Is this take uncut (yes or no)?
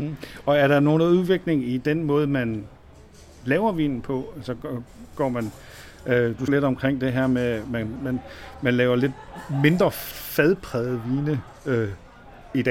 no